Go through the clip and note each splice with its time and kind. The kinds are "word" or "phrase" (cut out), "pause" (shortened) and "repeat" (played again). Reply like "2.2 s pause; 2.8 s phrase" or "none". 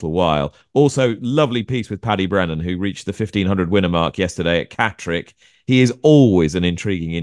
none